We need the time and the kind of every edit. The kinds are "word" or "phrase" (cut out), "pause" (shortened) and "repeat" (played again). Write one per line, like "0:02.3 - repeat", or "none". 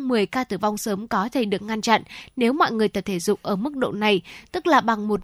none